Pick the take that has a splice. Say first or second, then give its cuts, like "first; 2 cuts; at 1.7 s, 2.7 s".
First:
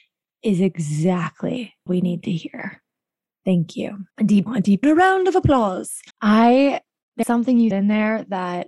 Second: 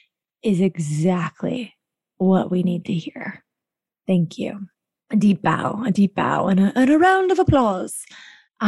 first; 7 cuts; at 1.9 s, 4.1 s, 4.5 s, 4.8 s, 6.1 s, 7.2 s, 7.7 s